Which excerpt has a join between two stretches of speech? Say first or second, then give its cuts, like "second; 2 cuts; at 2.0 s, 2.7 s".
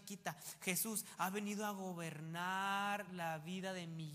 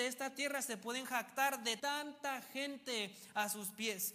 second; 1 cut; at 1.8 s